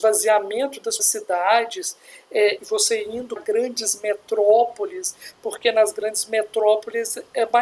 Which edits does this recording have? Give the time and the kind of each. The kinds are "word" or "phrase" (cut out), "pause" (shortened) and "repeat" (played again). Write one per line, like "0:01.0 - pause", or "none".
0:01.0 - word
0:02.6 - word
0:03.4 - word